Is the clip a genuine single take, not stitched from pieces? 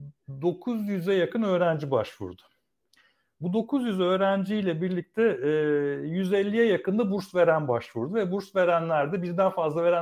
yes; 0 cuts

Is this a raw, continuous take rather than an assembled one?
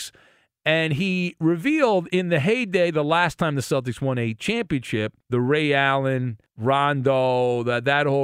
no; 2 cuts; at 5.2 s, 6.5 s

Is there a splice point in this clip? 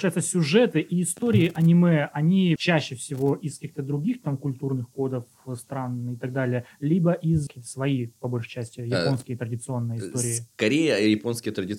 yes; 2 cuts; at 2.6 s, 7.5 s

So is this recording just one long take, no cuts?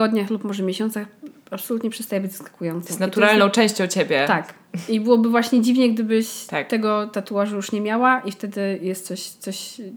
yes; 0 cuts

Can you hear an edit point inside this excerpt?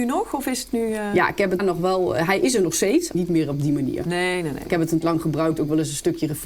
yes; 3 cuts; at 1.6 s, 3.1 s, 5.0 s

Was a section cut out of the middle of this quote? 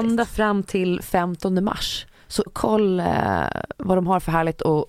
yes; 1 cut; at 2.5 s

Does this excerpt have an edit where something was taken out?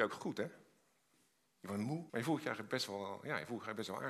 yes; 1 cut; at 2.1 s

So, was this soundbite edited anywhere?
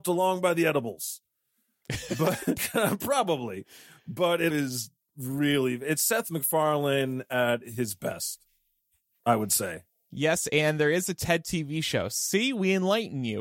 yes; 2 cuts; at 2.6 s, 4.5 s

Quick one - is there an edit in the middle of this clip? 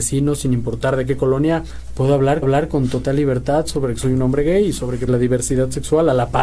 yes; 2 cuts; at 2.4 s, 5.1 s

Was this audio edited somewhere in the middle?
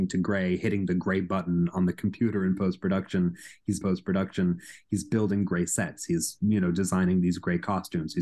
yes; 1 cut; at 3.8 s

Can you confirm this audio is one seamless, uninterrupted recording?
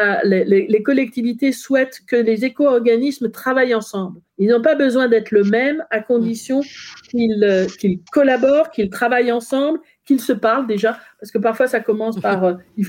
no; 2 cuts; at 4.3 s, 8.1 s

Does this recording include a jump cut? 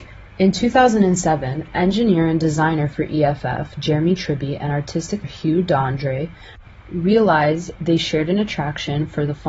yes; 1 cut; at 5.2 s

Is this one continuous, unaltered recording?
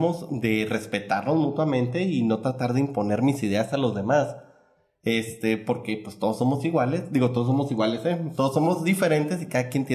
yes; 0 cuts

